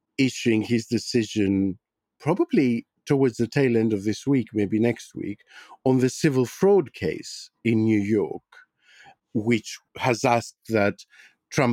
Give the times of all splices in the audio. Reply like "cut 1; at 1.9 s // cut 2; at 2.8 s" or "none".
cut 1; at 3.0 s // cut 2; at 9.9 s